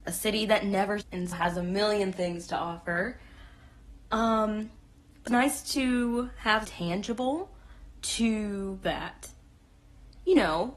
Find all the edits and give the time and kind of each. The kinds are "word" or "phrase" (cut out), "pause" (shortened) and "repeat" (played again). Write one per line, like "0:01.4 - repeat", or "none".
0:01.0 - word
0:01.3 - word
0:05.3 - word
0:06.6 - word
0:08.8 - word

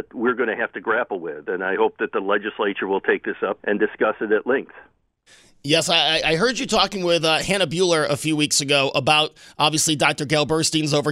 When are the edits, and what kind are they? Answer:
0:03.6 - word

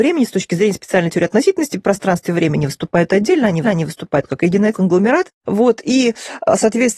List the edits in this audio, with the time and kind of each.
0:03.6 - repeat
0:04.7 - phrase

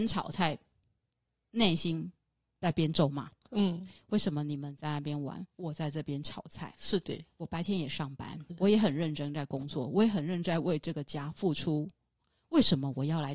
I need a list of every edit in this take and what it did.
0:08.5 - word

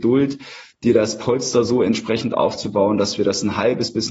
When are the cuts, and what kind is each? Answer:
none

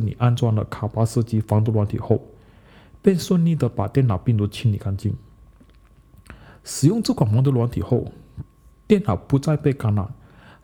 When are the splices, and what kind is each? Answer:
none

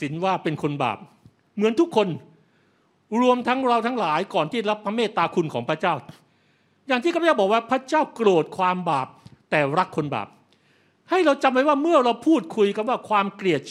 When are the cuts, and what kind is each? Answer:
none

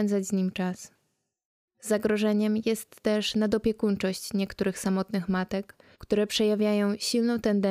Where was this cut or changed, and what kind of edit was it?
0:05.9 - pause

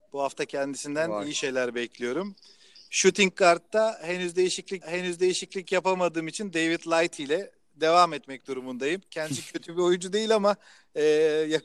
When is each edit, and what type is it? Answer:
0:04.8 - repeat

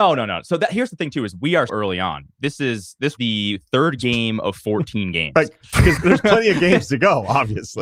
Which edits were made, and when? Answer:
0:01.7 - word
0:03.2 - word
0:06.0 - word

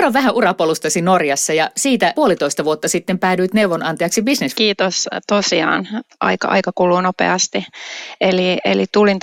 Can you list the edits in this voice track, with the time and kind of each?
0:02.1 - word
0:04.5 - phrase
0:06.1 - word

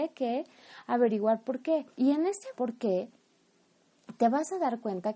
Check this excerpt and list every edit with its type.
0:01.9 - pause
0:02.5 - word

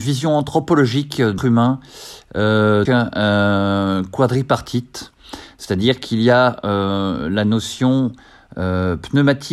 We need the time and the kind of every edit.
0:01.4 - word
0:02.9 - word

